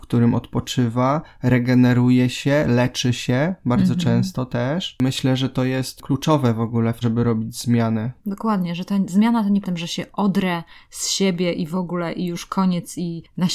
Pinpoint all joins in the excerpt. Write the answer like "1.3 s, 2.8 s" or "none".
7.0 s, 9.6 s